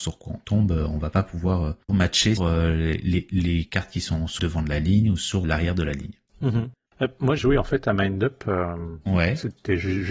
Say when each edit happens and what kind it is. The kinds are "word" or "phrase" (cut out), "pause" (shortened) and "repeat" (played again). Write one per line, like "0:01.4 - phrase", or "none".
0:01.9 - word
0:02.4 - word
0:04.4 - word
0:05.4 - word
0:07.4 - word
0:09.0 - pause